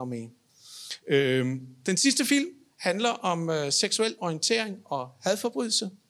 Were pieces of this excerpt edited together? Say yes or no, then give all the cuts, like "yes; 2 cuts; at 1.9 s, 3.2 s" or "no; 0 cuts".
no; 0 cuts